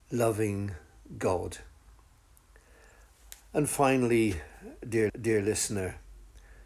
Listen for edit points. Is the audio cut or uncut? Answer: cut